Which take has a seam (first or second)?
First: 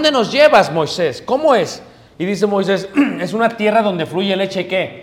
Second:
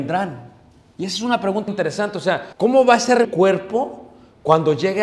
second